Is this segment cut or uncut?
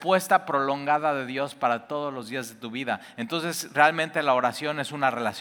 uncut